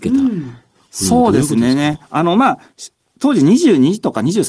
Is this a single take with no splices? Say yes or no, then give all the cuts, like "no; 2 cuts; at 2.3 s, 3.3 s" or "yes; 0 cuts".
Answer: yes; 0 cuts